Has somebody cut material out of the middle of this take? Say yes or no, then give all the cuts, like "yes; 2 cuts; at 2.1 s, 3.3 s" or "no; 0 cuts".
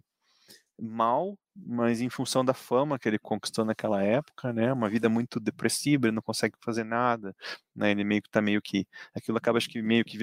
no; 0 cuts